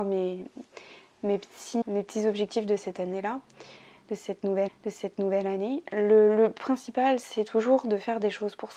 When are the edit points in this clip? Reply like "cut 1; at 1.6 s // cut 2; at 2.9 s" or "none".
cut 1; at 1.8 s // cut 2; at 4.7 s